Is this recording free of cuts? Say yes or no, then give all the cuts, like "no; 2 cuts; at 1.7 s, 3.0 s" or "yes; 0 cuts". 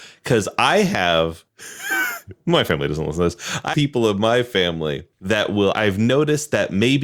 no; 4 cuts; at 1.5 s, 3.7 s, 5.1 s, 5.7 s